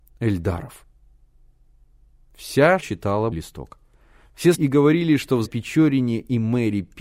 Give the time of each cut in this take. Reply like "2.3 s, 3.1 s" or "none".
2.8 s, 3.3 s, 4.5 s, 5.4 s